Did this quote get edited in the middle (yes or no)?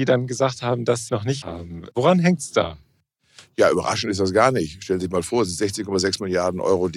yes